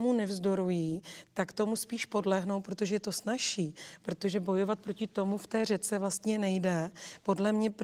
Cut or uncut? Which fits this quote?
uncut